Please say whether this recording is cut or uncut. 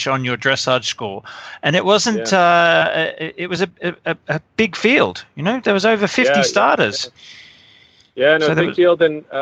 uncut